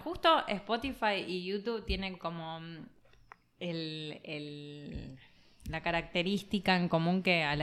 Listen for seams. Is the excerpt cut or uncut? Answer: uncut